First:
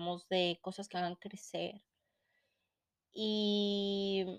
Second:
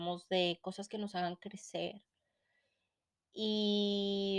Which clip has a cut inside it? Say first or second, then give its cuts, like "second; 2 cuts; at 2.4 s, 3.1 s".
first; 1 cut; at 0.9 s